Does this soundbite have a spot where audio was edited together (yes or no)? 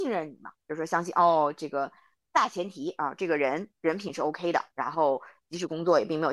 no